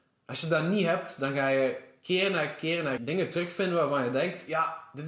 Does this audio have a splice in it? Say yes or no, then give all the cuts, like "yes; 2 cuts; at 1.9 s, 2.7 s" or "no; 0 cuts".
yes; 1 cut; at 3.0 s